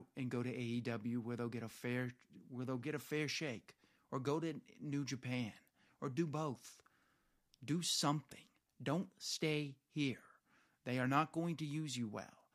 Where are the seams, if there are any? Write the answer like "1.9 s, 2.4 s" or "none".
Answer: none